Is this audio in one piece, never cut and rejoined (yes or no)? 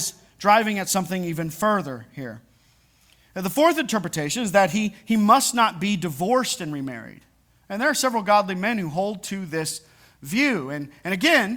yes